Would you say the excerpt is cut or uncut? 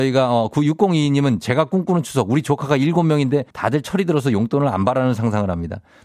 cut